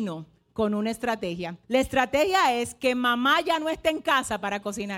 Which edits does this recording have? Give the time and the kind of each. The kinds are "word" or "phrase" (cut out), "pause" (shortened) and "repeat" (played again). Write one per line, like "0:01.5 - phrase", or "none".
0:01.6 - pause